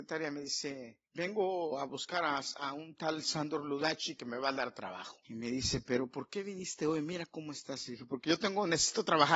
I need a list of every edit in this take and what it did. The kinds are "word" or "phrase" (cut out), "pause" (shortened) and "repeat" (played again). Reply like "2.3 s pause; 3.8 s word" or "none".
1.1 s pause; 5.2 s pause